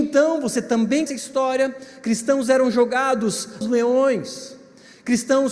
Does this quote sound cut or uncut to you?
cut